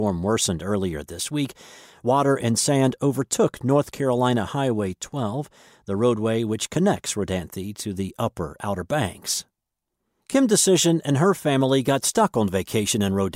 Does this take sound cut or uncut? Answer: uncut